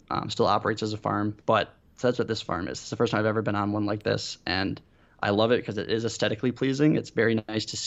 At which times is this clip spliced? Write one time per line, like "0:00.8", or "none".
0:01.4